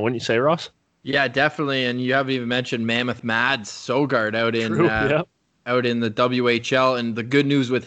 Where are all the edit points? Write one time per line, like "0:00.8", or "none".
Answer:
none